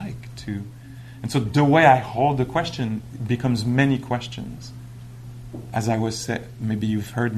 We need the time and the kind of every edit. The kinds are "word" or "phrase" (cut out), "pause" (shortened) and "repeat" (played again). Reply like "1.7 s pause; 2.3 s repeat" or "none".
none